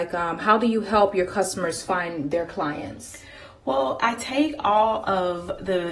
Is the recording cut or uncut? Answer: uncut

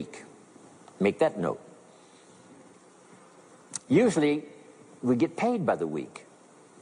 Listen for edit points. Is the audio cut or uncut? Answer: uncut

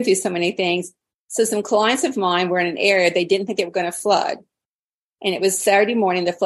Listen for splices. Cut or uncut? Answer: uncut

